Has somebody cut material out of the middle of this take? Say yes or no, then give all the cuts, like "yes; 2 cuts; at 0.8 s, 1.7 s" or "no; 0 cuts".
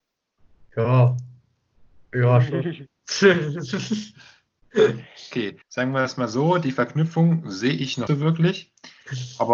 yes; 2 cuts; at 5.6 s, 8.1 s